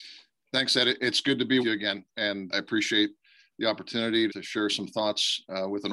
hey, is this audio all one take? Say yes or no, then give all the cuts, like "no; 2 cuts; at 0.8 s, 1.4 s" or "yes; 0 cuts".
no; 3 cuts; at 1.6 s, 2.5 s, 4.3 s